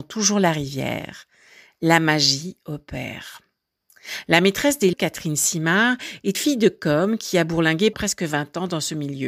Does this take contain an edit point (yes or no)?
yes